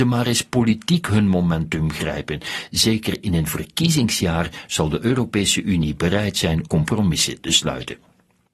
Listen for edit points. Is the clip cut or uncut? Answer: cut